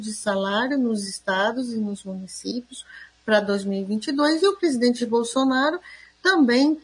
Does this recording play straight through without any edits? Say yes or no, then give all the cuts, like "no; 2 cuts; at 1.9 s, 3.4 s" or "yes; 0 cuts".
yes; 0 cuts